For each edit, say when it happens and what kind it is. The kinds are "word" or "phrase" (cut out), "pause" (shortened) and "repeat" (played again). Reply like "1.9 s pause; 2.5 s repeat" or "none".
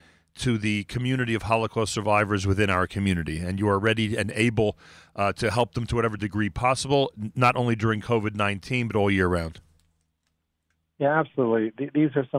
none